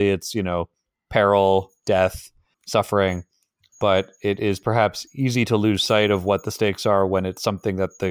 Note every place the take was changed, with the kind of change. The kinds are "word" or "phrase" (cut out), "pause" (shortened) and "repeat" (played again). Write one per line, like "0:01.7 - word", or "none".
none